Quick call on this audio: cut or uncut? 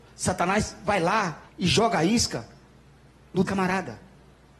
cut